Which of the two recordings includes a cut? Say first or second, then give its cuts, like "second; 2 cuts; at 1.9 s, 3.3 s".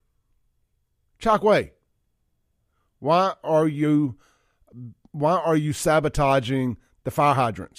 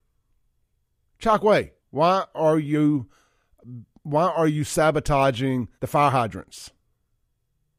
second; 2 cuts; at 1.8 s, 5.7 s